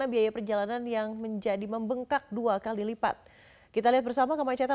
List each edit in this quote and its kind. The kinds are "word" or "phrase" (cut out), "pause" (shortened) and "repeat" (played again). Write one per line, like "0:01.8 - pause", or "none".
none